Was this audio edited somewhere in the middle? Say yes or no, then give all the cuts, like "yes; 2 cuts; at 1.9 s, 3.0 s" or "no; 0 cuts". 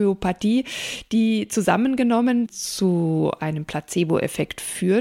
yes; 1 cut; at 2.5 s